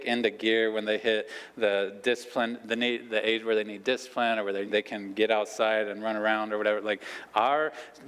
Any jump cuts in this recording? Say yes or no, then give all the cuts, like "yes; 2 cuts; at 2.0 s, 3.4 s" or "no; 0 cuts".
yes; 1 cut; at 4.7 s